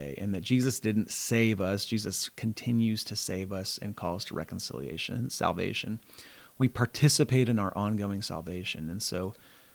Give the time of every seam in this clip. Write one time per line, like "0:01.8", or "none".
none